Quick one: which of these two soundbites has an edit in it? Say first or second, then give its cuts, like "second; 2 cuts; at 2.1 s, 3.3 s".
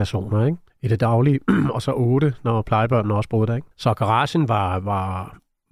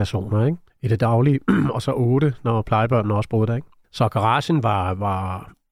first; 1 cut; at 3.7 s